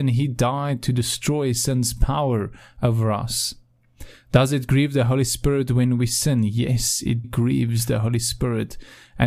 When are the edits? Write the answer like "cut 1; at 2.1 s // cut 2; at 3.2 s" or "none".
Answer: cut 1; at 7.2 s